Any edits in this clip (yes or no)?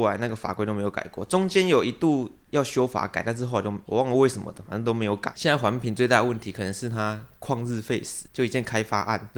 yes